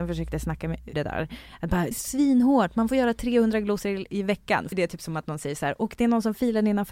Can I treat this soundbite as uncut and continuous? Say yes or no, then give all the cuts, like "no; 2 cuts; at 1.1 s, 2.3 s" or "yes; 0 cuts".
no; 3 cuts; at 0.9 s, 1.9 s, 4.7 s